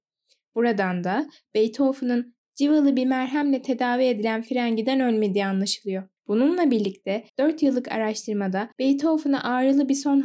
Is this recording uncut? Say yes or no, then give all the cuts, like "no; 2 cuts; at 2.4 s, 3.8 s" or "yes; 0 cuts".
no; 3 cuts; at 6.2 s, 7.3 s, 8.7 s